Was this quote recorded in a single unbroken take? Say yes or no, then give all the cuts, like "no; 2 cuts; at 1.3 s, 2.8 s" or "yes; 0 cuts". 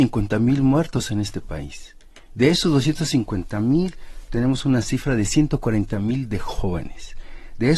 yes; 0 cuts